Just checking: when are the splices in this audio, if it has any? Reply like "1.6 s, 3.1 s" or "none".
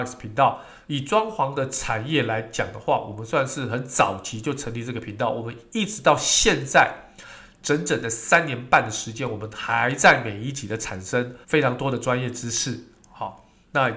11.4 s